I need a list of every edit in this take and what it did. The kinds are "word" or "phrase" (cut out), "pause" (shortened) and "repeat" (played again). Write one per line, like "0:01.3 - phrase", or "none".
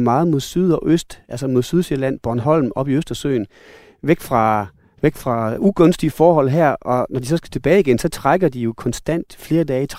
none